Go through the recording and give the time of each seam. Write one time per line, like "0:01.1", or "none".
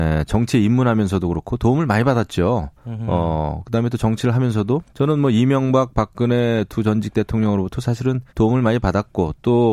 0:02.8
0:04.9
0:08.3